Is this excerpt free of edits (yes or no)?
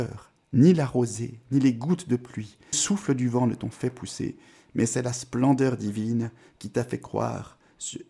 no